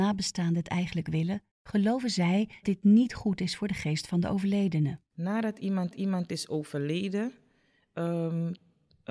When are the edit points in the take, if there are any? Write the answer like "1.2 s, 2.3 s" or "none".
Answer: 1.5 s, 2.6 s, 5.9 s

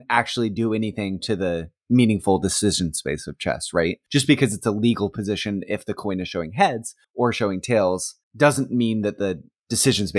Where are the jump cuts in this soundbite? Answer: none

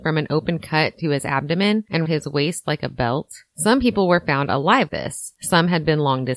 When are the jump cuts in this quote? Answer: 2.1 s, 4.9 s

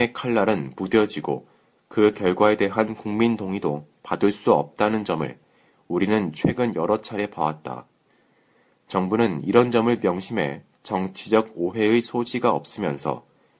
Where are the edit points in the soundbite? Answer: none

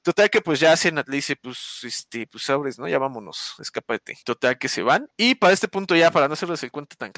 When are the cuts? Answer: 4.2 s, 5.1 s

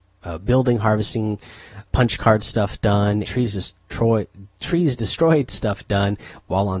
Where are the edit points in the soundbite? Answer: 1.9 s, 3.2 s

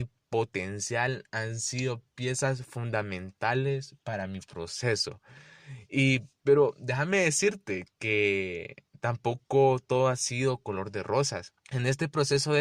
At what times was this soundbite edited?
6.4 s, 11.6 s

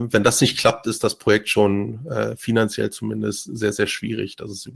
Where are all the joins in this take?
none

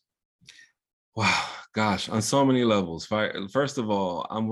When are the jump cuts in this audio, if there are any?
none

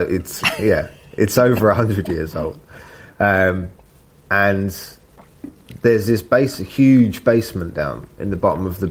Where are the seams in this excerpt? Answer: none

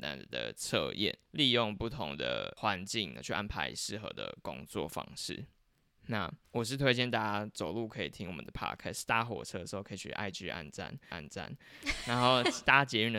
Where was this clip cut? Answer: 6.4 s, 11.1 s

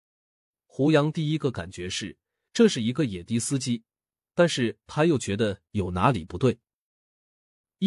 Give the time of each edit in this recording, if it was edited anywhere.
none

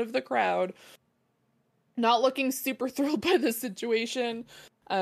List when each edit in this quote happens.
none

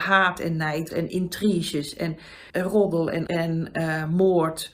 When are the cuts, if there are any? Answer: 0.9 s, 2.5 s, 3.3 s

